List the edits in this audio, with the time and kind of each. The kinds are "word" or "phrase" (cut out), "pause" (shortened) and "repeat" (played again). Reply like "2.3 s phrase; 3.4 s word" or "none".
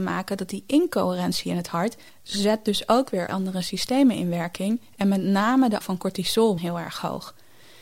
2.1 s pause; 3.3 s word; 5.8 s word; 6.6 s phrase